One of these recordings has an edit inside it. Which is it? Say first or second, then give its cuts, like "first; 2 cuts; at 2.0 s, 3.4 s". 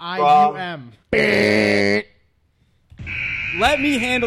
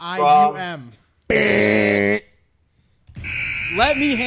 first; 1 cut; at 1.0 s